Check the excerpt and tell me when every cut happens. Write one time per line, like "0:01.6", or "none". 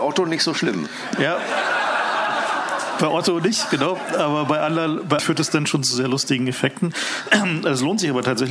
0:05.2